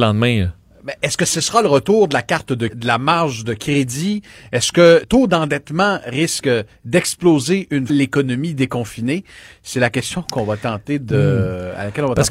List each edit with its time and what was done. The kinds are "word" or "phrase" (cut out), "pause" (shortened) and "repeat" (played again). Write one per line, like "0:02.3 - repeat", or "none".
0:02.7 - word
0:05.0 - word
0:07.9 - word